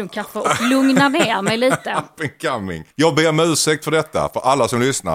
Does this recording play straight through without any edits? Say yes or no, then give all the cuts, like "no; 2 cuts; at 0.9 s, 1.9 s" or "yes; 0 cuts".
no; 1 cut; at 2.9 s